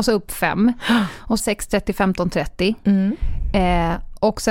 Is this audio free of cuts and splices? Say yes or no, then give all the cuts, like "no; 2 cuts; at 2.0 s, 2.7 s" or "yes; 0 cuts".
no; 1 cut; at 1.4 s